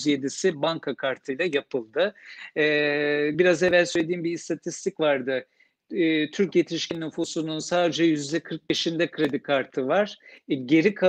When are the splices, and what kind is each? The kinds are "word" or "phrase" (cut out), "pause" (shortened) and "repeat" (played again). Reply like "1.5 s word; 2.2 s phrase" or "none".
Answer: none